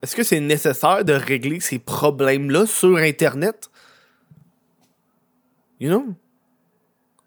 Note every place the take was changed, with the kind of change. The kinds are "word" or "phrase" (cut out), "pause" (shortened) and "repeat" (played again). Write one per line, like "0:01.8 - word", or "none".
none